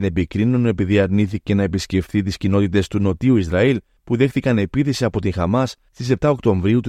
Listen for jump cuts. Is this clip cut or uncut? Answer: uncut